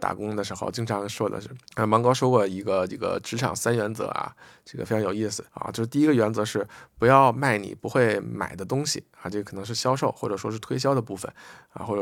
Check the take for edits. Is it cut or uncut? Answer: cut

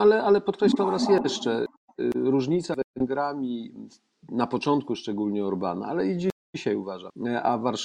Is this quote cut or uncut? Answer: uncut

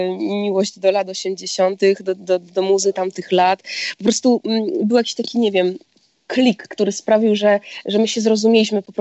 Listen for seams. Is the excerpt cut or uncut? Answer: uncut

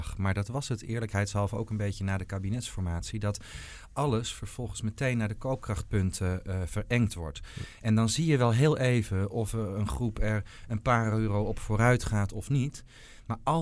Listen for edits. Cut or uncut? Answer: uncut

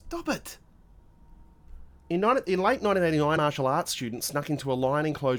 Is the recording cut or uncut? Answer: cut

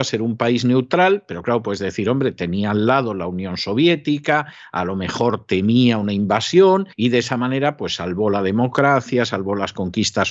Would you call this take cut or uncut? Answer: cut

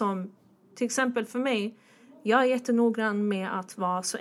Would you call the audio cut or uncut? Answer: uncut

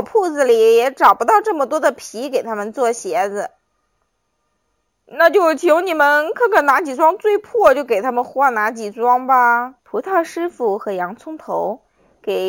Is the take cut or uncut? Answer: cut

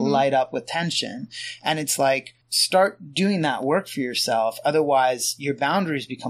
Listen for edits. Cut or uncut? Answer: cut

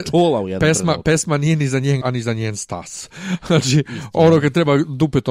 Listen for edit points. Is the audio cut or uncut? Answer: cut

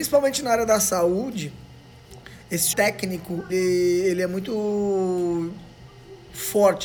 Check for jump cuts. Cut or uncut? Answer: cut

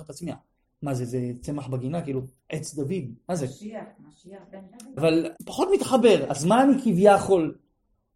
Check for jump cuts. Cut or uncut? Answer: cut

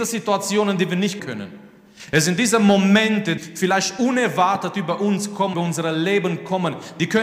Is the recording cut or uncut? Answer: cut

